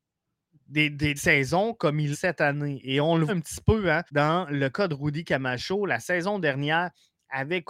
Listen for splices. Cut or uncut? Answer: cut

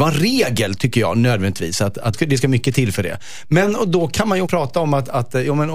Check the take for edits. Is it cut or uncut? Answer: cut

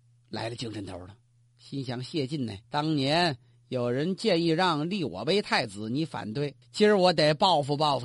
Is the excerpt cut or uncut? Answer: cut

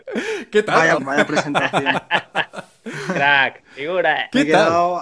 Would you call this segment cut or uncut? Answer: cut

